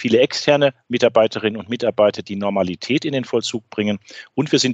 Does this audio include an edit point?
no; 0 cuts

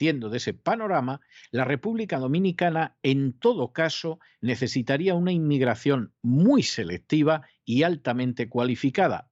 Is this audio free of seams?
yes; 0 cuts

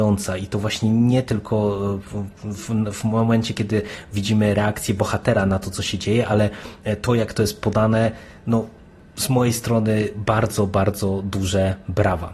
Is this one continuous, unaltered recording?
yes; 0 cuts

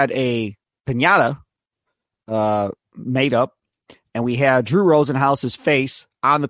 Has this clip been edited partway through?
no; 0 cuts

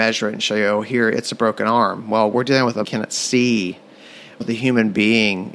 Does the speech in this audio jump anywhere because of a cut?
yes; 2 cuts; at 2.8 s, 4.4 s

